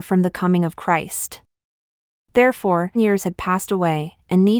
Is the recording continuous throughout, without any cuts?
no; 1 cut; at 3.0 s

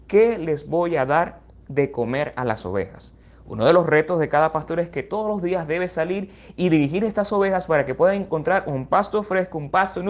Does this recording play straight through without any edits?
yes; 0 cuts

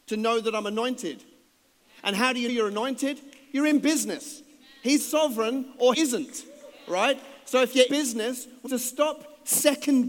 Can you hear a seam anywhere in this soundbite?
yes; 5 cuts; at 2.5 s, 5.0 s, 5.9 s, 7.9 s, 8.7 s

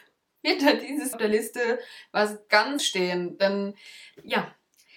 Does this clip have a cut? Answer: yes; 2 cuts; at 1.1 s, 2.8 s

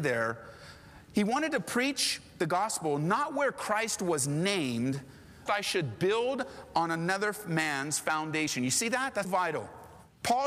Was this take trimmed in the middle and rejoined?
yes; 2 cuts; at 5.5 s, 9.2 s

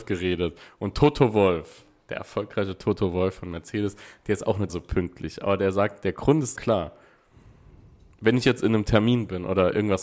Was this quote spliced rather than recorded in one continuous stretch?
yes; 2 cuts; at 4.7 s, 6.6 s

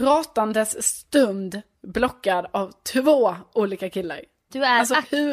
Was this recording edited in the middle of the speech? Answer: no; 0 cuts

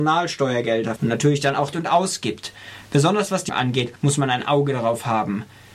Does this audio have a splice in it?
yes; 3 cuts; at 1.0 s, 1.7 s, 3.5 s

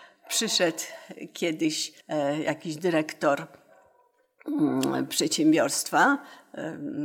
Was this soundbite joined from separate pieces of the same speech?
yes; 1 cut; at 2.0 s

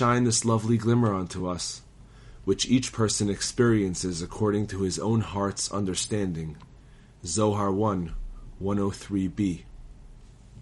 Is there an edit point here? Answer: no; 0 cuts

